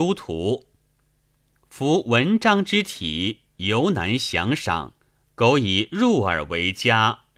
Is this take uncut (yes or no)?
no